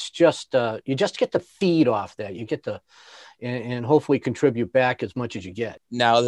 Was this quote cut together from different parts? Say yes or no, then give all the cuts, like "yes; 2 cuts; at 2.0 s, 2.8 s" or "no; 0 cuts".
no; 0 cuts